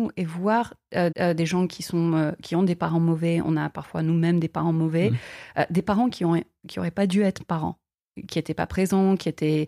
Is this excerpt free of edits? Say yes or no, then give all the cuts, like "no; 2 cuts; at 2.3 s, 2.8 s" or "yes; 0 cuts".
no; 1 cut; at 1.1 s